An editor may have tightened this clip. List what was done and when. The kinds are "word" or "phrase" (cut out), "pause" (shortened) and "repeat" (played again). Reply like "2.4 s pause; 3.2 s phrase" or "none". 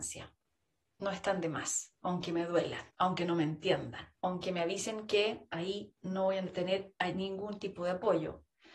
2.0 s pause; 2.9 s pause; 4.1 s pause